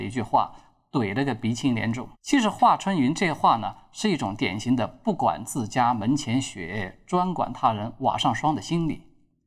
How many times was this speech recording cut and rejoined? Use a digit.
1